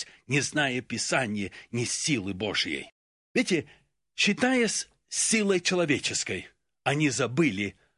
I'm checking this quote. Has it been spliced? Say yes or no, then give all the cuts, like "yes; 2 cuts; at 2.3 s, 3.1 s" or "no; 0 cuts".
no; 0 cuts